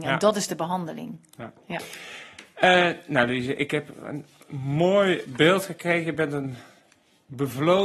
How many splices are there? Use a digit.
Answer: 0